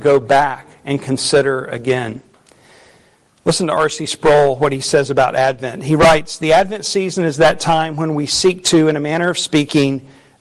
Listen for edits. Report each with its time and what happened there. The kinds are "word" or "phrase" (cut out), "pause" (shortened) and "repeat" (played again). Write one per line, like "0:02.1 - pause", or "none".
none